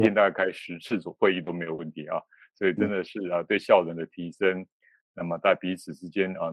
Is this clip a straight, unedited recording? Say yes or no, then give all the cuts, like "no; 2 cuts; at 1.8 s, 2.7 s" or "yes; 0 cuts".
yes; 0 cuts